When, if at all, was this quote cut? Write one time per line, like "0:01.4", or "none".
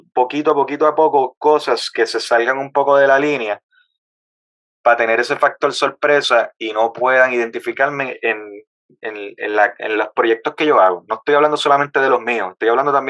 none